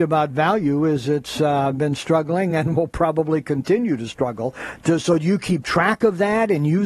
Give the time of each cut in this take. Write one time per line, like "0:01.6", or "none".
none